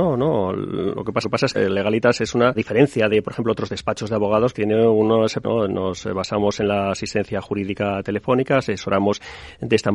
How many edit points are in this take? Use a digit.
5